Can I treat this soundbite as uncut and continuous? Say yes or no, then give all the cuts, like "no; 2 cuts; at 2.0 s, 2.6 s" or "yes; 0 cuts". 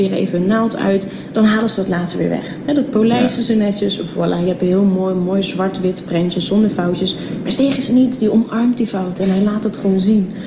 yes; 0 cuts